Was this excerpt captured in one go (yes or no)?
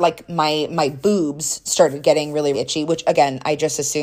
no